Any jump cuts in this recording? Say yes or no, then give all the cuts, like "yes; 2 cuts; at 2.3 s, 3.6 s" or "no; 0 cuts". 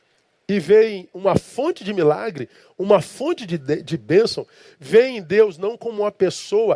no; 0 cuts